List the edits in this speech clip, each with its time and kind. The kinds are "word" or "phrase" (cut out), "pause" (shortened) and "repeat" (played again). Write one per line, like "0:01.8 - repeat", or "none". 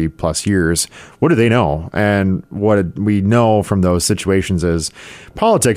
none

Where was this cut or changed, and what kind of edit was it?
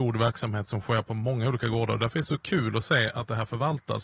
none

